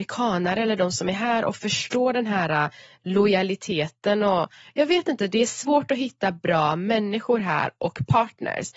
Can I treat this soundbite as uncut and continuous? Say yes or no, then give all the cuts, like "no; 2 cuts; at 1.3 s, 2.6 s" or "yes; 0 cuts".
yes; 0 cuts